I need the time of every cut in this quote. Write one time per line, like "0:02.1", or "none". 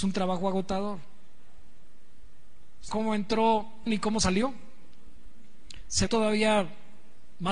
0:02.9
0:03.9
0:06.1